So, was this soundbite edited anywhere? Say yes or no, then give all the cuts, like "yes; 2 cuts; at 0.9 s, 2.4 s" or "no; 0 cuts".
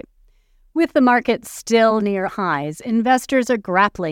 yes; 1 cut; at 2.3 s